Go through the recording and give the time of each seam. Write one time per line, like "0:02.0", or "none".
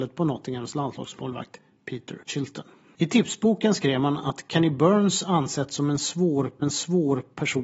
0:02.2
0:06.6